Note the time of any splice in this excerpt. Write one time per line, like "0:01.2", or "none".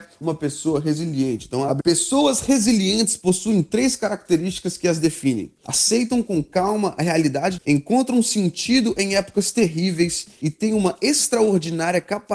0:01.8
0:07.6